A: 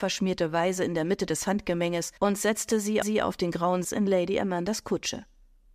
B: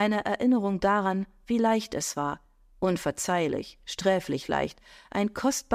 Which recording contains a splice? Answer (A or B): A